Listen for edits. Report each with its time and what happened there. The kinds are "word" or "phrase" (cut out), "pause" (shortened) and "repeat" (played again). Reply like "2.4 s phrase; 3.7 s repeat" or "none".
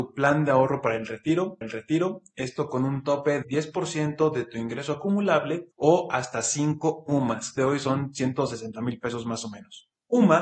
1.6 s repeat; 3.4 s word; 5.7 s pause; 7.6 s phrase